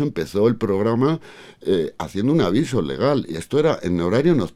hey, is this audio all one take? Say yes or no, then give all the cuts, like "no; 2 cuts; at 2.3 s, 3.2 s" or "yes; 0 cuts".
yes; 0 cuts